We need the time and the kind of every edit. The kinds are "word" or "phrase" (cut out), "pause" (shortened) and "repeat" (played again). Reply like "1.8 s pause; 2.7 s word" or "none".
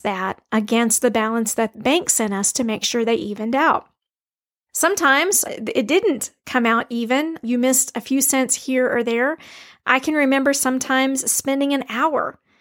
1.7 s word; 5.5 s word